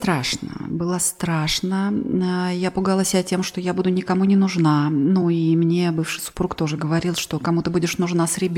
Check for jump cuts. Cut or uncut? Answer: uncut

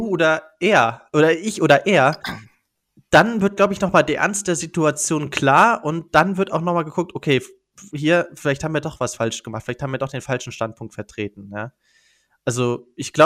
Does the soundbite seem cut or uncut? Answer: uncut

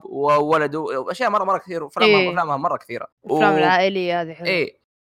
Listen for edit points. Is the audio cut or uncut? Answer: cut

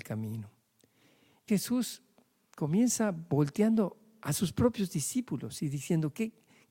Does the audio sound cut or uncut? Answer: cut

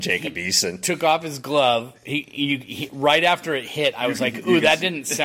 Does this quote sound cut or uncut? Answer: uncut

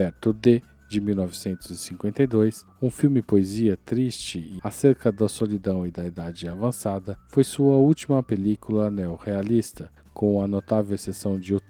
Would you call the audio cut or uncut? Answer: cut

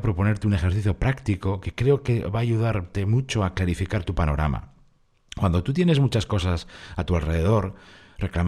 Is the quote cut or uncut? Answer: uncut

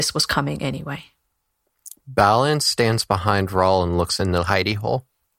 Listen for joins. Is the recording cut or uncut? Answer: uncut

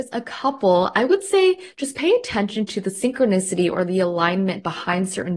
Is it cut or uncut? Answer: uncut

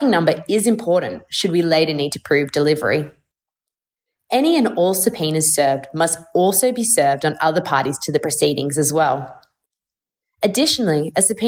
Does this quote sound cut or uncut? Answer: uncut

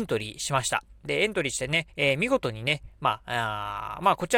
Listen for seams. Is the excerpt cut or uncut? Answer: cut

